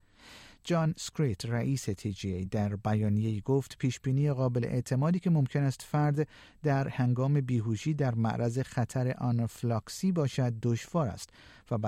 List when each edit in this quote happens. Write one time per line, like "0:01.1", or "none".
none